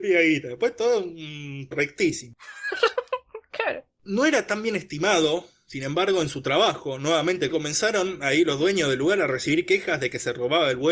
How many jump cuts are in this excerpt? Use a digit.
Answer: 2